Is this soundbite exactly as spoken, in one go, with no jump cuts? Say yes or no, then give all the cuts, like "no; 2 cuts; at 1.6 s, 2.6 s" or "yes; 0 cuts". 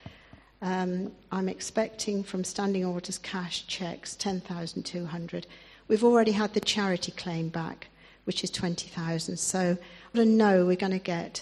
no; 1 cut; at 10.1 s